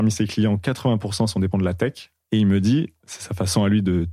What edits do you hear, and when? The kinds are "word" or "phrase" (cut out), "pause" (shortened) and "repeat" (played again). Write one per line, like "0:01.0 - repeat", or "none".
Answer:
0:01.5 - word